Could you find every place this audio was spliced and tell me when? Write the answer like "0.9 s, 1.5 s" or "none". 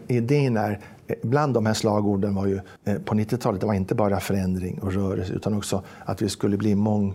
2.8 s